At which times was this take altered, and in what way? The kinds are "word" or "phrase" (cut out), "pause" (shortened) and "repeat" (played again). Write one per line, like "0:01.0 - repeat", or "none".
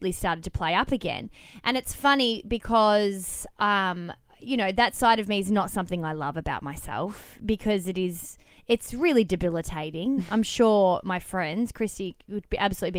none